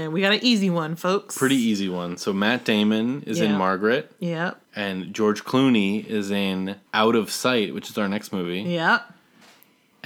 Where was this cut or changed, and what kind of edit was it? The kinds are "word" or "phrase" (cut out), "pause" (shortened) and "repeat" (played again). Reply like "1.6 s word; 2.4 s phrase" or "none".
4.6 s pause; 6.9 s pause